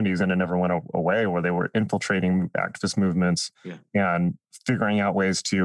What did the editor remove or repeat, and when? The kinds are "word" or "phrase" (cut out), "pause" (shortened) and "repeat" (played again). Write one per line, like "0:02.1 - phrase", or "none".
0:03.5 - pause

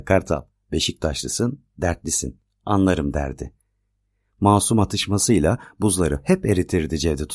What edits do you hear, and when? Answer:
none

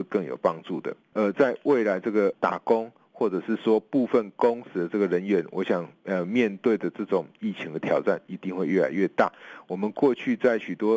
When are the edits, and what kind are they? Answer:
0:01.0 - pause

